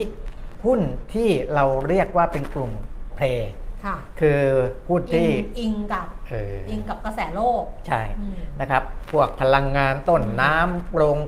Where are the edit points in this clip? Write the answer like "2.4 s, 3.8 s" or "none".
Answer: 3.1 s